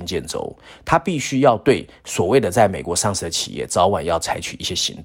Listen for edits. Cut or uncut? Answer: uncut